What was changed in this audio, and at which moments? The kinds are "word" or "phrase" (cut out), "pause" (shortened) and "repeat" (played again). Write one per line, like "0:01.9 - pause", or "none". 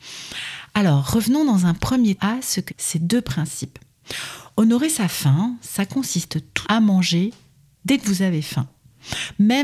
0:02.2 - word
0:02.7 - word
0:06.6 - word

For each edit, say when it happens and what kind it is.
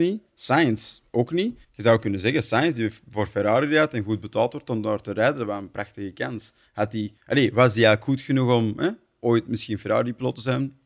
0:01.6 - pause
0:07.2 - pause

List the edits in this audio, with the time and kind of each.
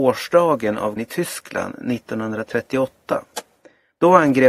0:01.0 - word

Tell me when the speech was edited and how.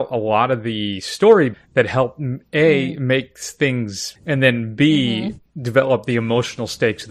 0:01.5 - word
0:04.2 - phrase

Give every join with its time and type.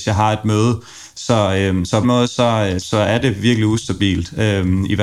0:02.0 - phrase
0:02.8 - word

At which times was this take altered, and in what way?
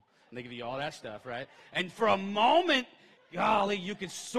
0:03.2 - pause

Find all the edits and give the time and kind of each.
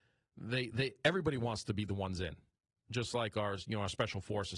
none

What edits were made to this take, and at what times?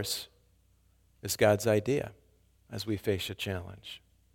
none

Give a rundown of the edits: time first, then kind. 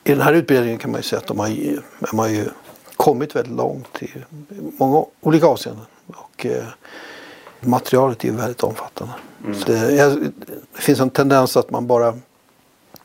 0:02.1 - phrase
0:02.8 - pause
0:05.1 - pause
0:07.6 - word
0:09.6 - word
0:10.6 - pause

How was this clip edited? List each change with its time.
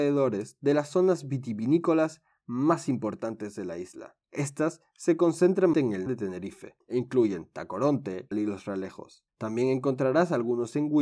0:04.2 - pause
0:05.7 - word
0:06.1 - word
0:06.8 - pause
0:08.3 - phrase
0:09.3 - pause

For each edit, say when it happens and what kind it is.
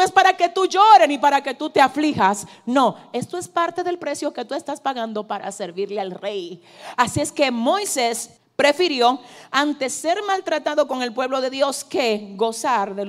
0:08.4 - pause

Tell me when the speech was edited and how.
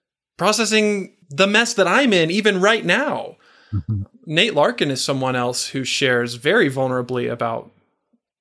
0:01.2 - pause
0:04.1 - pause

